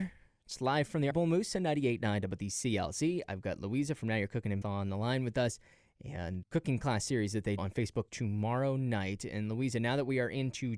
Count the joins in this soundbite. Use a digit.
5